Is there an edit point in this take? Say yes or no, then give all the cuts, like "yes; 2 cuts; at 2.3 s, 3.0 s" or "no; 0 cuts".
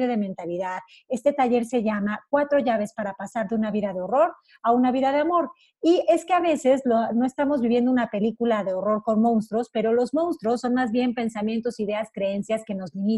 no; 0 cuts